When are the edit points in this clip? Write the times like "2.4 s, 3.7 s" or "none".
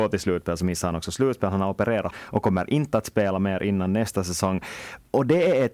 2.1 s

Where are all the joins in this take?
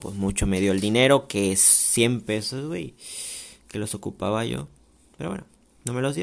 none

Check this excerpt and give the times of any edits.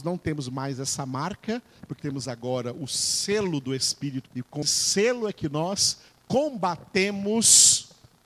2.0 s, 4.3 s, 4.6 s

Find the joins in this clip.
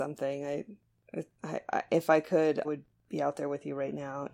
1.3 s, 2.6 s

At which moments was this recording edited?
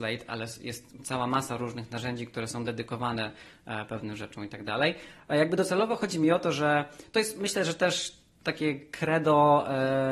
none

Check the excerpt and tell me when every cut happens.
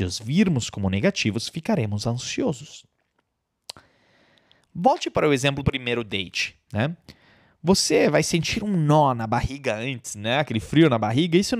5.6 s

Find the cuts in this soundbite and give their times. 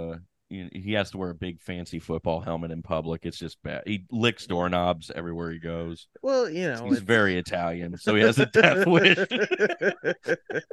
none

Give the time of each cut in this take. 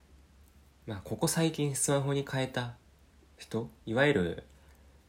3.8 s

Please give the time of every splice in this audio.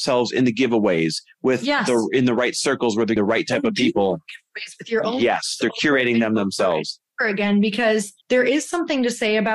3.2 s, 8.2 s

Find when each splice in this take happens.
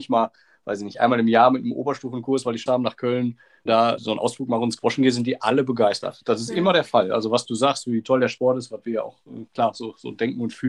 2.7 s, 3.7 s, 4.0 s

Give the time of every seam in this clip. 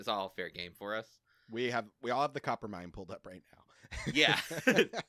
none

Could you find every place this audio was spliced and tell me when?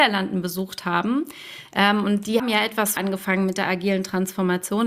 2.4 s, 3.0 s

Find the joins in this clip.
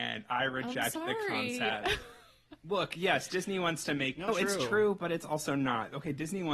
4.3 s

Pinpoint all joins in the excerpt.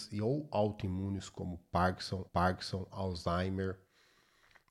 2.3 s

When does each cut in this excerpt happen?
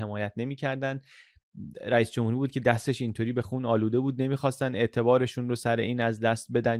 none

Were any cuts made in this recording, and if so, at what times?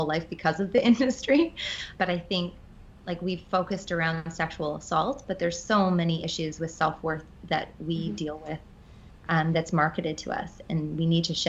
2.0 s

